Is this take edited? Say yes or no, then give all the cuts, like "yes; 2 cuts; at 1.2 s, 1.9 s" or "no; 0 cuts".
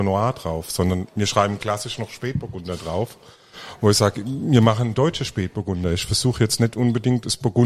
no; 0 cuts